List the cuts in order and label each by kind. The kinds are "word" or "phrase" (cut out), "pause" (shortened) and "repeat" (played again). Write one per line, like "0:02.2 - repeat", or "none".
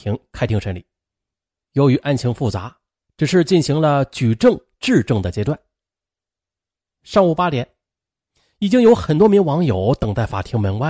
none